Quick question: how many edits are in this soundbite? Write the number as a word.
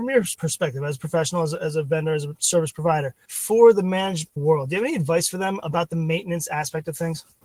zero